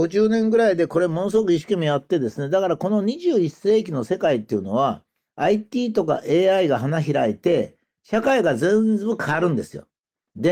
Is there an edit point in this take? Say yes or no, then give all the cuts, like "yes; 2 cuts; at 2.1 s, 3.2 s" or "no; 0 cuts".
no; 0 cuts